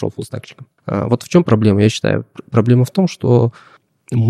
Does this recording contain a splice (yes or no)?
no